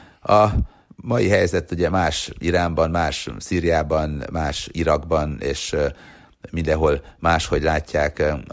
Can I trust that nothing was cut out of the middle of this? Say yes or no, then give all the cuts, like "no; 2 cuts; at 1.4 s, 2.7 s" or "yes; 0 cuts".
yes; 0 cuts